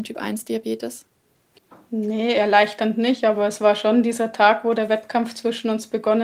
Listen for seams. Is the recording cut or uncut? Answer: uncut